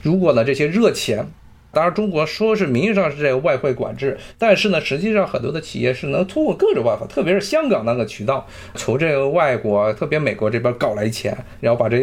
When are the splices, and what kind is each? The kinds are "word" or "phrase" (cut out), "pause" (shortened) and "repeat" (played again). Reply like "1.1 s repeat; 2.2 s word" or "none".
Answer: none